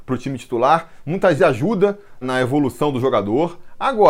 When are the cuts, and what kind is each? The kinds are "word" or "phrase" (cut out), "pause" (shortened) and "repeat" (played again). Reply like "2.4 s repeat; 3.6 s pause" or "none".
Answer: 1.4 s word; 2.2 s word